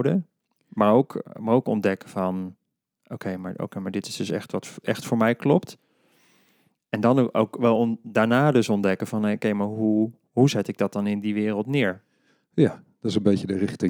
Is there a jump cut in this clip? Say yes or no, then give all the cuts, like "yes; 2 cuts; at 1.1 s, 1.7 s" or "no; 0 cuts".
no; 0 cuts